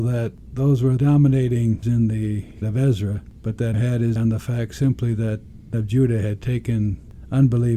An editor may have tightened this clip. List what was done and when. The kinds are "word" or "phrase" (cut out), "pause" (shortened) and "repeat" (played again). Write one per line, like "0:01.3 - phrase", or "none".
0:01.0 - word
0:01.8 - word
0:02.6 - word
0:03.7 - word
0:04.2 - word
0:05.7 - word

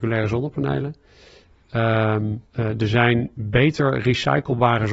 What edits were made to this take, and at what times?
0:02.5 - pause

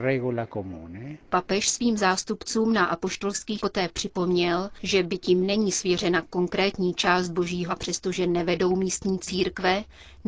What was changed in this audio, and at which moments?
0:03.6 - word
0:07.7 - word

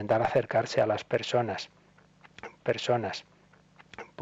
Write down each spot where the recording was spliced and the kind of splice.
0:02.6 - repeat

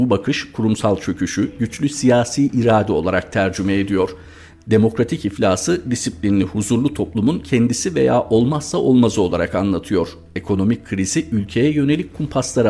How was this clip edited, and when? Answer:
none

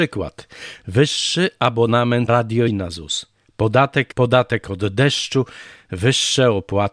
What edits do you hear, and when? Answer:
0:02.3 - word
0:02.7 - phrase
0:04.1 - word

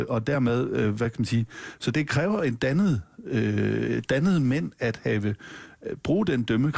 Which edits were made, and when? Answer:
0:01.9 - word

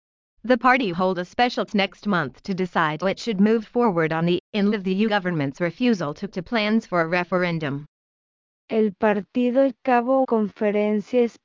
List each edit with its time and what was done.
0:00.9 - word
0:01.7 - word
0:03.0 - word
0:04.4 - word
0:04.7 - word
0:05.1 - word
0:06.3 - word
0:09.7 - word
0:10.2 - word

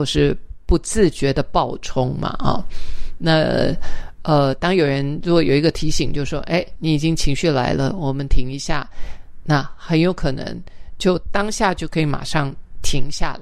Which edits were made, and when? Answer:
0:06.8 - phrase

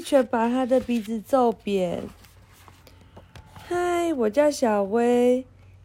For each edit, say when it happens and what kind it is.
0:03.5 - pause

